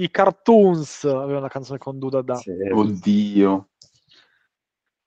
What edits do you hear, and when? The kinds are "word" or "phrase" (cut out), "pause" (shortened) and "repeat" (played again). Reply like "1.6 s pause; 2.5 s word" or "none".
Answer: none

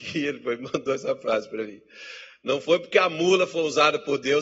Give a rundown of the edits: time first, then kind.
none

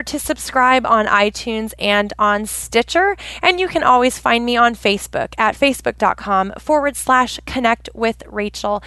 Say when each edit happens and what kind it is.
none

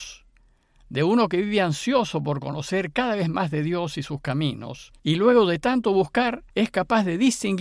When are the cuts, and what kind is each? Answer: 5.0 s pause; 6.5 s pause

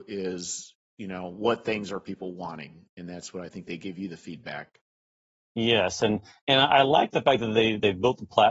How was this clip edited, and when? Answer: none

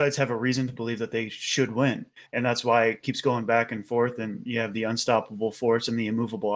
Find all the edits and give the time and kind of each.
2.3 s pause

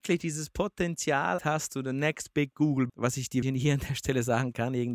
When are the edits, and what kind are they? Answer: 1.4 s word; 1.7 s word; 2.9 s word; 3.4 s word

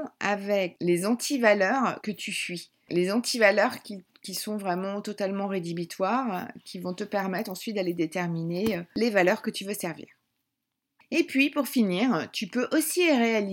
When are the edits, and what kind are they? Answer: none

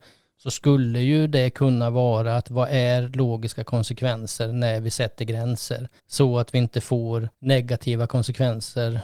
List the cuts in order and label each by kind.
6.0 s pause; 7.3 s pause

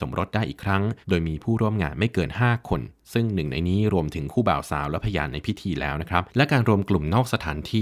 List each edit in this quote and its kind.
1.0 s pause; 6.3 s pause

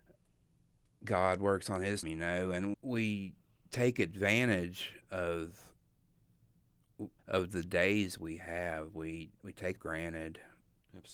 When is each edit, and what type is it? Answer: 2.0 s word; 2.7 s word; 7.2 s pause; 9.8 s phrase

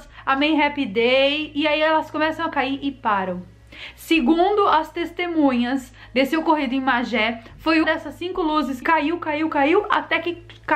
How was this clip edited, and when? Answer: 7.8 s word; 8.8 s word; 9.5 s word

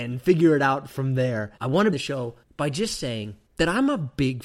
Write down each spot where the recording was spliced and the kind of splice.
1.6 s pause; 1.9 s word; 2.4 s pause; 3.5 s pause

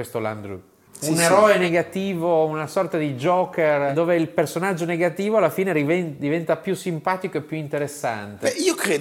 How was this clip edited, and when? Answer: none

